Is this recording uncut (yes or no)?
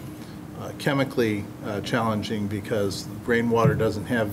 yes